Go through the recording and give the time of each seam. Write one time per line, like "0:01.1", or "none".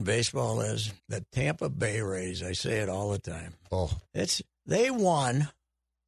0:01.0
0:04.1